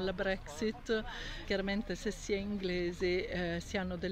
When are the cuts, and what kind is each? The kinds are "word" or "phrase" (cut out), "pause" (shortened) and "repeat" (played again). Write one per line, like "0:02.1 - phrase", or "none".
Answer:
0:01.4 - word